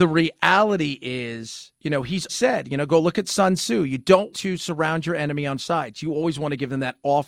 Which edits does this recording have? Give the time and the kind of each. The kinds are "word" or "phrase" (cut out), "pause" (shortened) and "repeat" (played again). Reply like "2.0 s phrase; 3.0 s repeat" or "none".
1.8 s pause; 2.3 s word; 4.3 s word; 5.6 s word